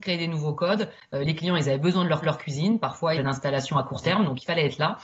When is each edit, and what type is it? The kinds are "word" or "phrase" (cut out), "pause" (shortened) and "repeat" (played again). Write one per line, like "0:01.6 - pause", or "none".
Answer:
0:02.2 - repeat
0:03.2 - phrase